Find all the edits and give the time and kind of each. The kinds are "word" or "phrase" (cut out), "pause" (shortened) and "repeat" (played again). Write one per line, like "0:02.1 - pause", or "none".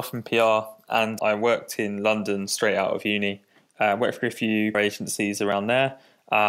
0:01.2 - word
0:04.7 - word